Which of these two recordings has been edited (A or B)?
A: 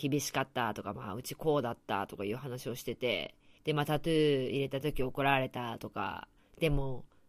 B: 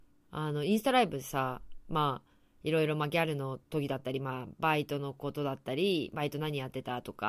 A